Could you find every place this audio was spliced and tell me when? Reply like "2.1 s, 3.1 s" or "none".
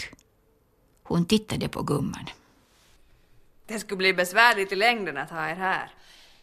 none

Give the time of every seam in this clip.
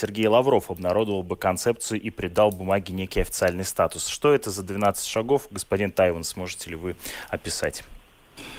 none

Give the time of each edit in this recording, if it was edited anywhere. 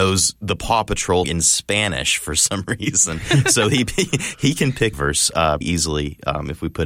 1.2 s, 4.9 s, 5.6 s

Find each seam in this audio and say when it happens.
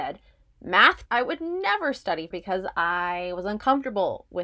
1.1 s, 2.3 s

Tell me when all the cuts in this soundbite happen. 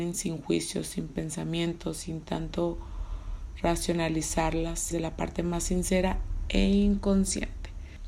4.9 s

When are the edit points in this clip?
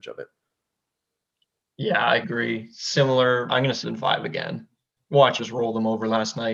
2.2 s, 3.5 s, 3.8 s, 5.4 s

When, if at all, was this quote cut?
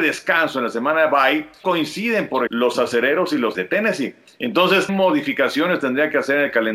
1.6 s, 2.5 s, 3.5 s, 4.9 s

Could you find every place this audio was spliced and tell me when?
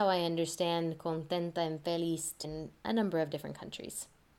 2.4 s

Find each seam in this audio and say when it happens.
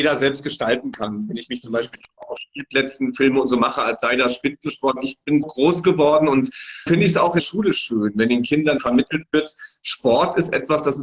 5.4 s, 6.9 s, 7.4 s, 8.8 s

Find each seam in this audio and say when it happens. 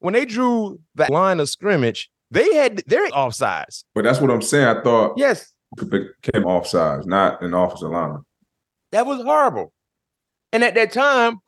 1.1 s, 2.2 s, 3.1 s, 3.9 s, 5.8 s, 6.4 s, 8.6 s

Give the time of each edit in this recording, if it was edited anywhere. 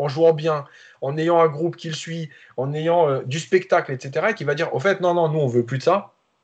none

